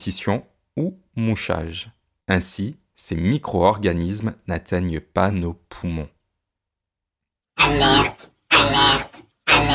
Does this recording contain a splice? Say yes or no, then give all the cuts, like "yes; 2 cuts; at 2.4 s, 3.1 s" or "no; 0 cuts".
no; 0 cuts